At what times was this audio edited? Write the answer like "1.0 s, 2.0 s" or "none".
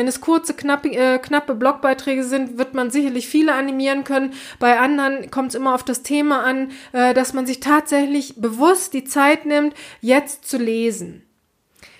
none